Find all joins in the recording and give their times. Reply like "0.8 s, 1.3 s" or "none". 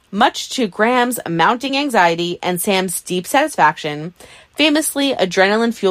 none

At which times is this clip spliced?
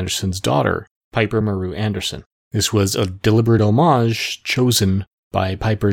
none

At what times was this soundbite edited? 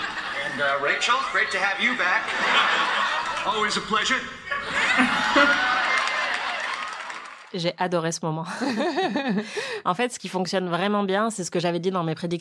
none

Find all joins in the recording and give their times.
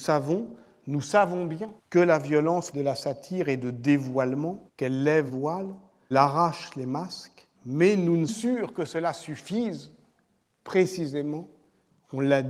1.8 s, 2.7 s, 4.7 s, 5.3 s, 6.1 s, 7.5 s, 8.3 s

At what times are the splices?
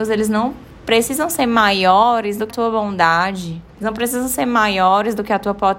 2.5 s, 3.7 s

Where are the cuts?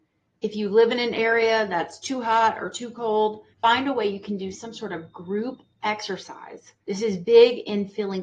3.5 s, 6.8 s

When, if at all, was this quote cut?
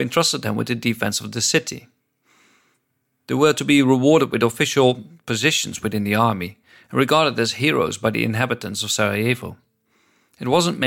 none

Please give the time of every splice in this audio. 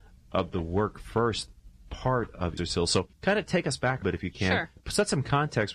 2.6 s, 3.1 s, 4.0 s

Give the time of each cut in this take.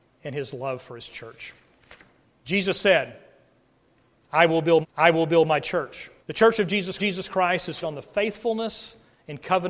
2.2 s, 4.8 s, 6.2 s, 7.0 s, 7.8 s

